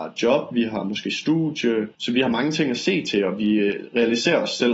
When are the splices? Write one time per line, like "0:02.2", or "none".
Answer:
0:01.9